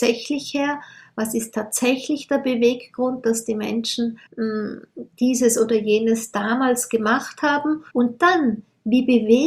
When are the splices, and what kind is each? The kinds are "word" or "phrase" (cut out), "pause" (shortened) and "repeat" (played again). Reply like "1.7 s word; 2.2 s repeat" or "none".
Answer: 4.3 s pause; 7.9 s pause